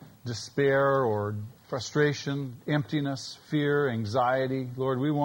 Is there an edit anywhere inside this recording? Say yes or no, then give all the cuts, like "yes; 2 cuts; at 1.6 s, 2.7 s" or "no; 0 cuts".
yes; 1 cut; at 1.6 s